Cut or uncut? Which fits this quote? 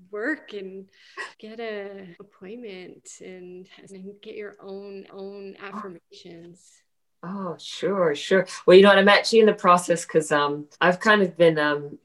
cut